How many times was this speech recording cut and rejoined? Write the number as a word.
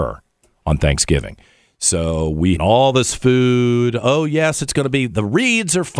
one